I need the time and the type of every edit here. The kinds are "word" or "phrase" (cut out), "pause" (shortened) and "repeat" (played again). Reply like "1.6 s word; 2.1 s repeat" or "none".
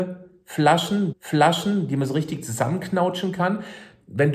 1.1 s repeat